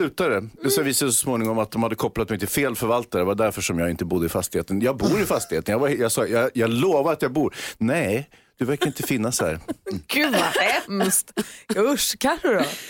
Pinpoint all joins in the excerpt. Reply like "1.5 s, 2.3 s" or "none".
none